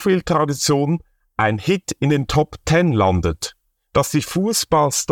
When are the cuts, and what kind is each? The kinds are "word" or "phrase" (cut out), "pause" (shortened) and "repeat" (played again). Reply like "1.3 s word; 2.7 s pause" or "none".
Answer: none